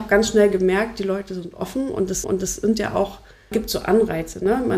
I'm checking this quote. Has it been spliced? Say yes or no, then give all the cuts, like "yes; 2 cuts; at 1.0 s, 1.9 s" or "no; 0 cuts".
yes; 2 cuts; at 2.2 s, 3.5 s